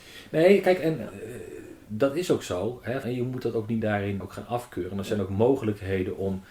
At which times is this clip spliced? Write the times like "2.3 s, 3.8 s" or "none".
3.0 s, 3.8 s, 4.2 s